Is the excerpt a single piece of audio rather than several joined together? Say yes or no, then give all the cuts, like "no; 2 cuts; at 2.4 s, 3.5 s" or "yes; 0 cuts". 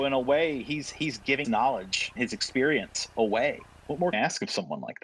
no; 3 cuts; at 1.4 s, 2.2 s, 4.1 s